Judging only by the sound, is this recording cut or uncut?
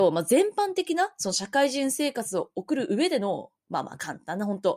uncut